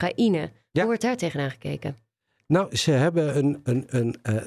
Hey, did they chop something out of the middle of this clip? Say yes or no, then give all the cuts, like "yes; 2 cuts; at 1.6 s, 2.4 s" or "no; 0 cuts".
no; 0 cuts